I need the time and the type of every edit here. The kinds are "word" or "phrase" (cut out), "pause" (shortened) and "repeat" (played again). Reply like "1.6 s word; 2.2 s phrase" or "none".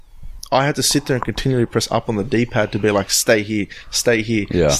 none